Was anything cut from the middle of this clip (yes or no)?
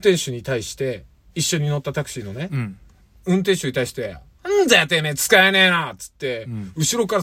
no